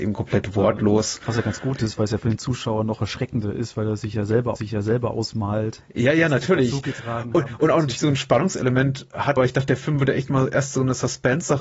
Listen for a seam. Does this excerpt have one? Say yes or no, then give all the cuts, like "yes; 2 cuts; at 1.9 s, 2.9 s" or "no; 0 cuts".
yes; 2 cuts; at 4.6 s, 9.4 s